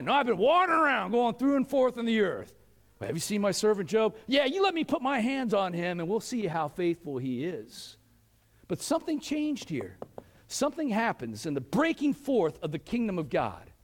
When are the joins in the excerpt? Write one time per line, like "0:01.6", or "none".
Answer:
none